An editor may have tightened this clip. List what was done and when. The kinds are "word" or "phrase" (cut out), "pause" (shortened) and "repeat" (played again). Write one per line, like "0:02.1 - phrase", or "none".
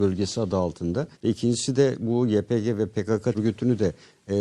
0:01.1 - pause
0:03.3 - word